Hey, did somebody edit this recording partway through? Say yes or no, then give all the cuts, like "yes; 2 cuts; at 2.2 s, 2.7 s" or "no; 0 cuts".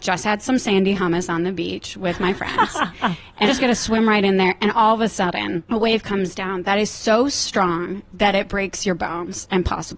yes; 1 cut; at 3.5 s